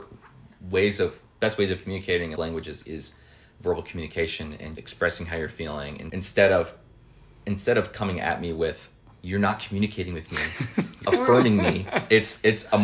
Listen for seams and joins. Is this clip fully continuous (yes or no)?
no